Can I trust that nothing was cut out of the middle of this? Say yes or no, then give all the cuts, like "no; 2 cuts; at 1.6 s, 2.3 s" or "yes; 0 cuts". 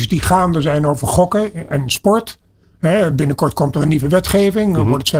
yes; 0 cuts